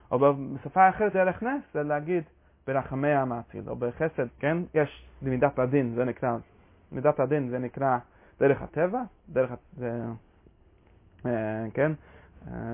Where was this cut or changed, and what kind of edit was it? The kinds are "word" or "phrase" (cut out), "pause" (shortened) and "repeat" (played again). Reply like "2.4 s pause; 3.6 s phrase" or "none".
1.1 s word; 4.3 s word